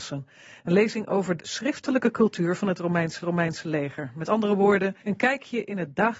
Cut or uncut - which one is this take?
cut